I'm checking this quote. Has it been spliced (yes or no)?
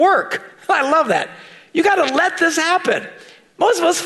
no